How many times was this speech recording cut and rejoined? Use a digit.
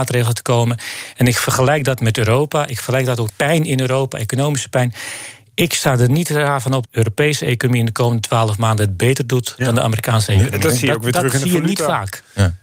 2